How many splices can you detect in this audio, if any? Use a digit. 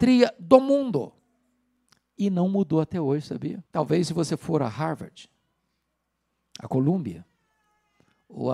2